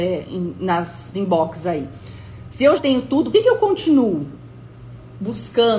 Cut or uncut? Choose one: cut